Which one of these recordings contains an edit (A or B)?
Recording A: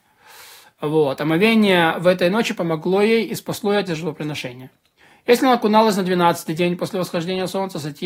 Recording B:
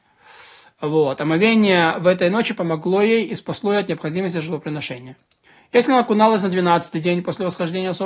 A